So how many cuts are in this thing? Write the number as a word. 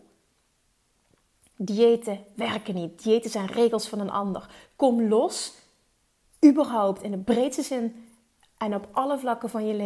zero